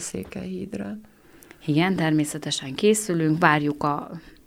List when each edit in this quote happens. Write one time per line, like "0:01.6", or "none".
none